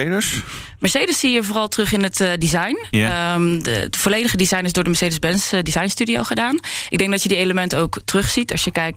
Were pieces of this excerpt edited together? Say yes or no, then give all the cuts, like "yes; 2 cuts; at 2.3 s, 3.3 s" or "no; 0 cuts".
no; 0 cuts